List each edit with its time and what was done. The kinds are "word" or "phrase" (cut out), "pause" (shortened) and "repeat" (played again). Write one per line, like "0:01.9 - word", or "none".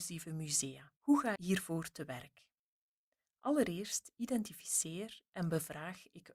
0:01.0 - pause
0:01.4 - word